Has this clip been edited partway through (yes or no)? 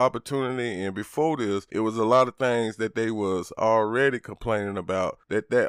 no